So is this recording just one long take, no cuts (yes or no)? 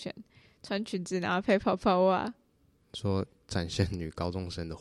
yes